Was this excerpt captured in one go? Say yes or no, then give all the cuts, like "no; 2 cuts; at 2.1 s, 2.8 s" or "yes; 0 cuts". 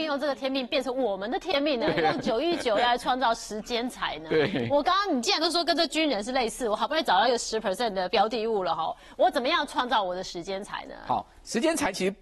yes; 0 cuts